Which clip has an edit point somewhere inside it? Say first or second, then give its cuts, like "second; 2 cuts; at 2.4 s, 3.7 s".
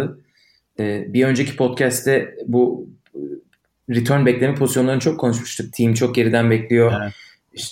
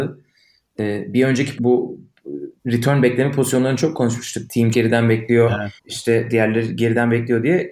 second; 4 cuts; at 1.6 s, 2.6 s, 4.7 s, 5.8 s